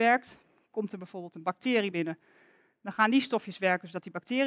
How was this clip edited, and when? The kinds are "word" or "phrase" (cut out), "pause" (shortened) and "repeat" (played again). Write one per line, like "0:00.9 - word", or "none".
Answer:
none